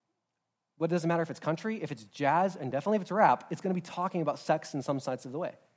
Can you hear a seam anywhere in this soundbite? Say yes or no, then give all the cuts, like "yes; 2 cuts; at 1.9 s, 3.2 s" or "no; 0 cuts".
no; 0 cuts